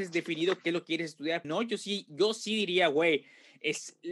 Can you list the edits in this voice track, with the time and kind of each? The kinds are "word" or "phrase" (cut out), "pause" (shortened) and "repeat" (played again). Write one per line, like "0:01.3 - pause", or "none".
0:01.4 - phrase